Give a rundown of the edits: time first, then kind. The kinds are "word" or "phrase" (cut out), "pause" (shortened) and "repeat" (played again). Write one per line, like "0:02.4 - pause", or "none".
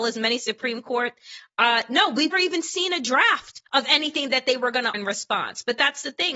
0:02.3 - word
0:03.7 - pause
0:04.9 - word